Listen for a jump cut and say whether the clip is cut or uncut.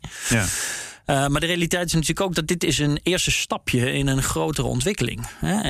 uncut